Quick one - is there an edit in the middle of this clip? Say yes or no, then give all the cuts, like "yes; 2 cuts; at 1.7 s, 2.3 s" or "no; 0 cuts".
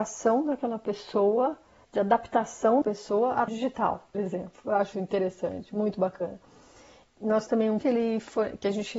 yes; 6 cuts; at 2.8 s, 3.5 s, 4.1 s, 4.9 s, 7.5 s, 7.8 s